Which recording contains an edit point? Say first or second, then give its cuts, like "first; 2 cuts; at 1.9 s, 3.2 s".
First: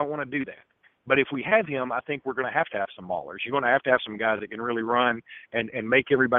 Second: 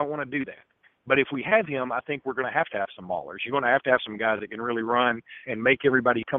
second; 1 cut; at 5.4 s